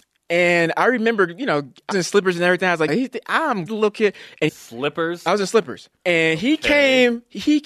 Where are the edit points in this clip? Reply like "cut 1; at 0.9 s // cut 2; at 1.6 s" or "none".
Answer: cut 1; at 1.9 s // cut 2; at 2.9 s // cut 3; at 3.7 s // cut 4; at 4.5 s // cut 5; at 6.0 s

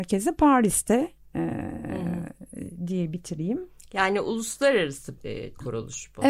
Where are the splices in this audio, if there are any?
cut 1; at 5.2 s

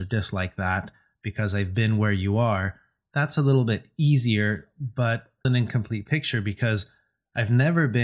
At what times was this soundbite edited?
cut 1; at 5.4 s

